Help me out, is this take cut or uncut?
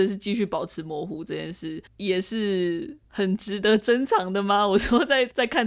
cut